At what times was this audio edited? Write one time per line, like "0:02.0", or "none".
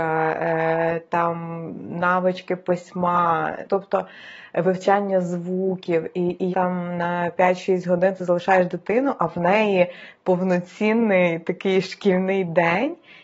0:03.6
0:06.5